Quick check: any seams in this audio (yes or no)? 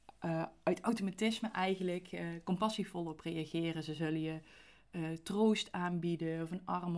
no